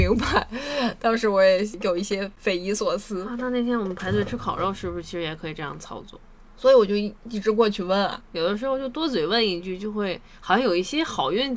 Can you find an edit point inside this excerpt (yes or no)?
no